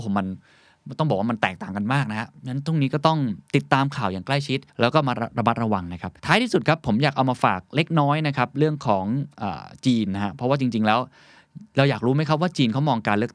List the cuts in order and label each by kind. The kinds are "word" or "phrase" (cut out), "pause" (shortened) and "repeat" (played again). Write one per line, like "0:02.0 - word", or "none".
0:03.5 - pause
0:04.7 - pause
0:06.2 - pause